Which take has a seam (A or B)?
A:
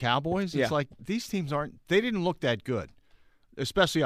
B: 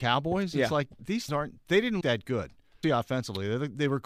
B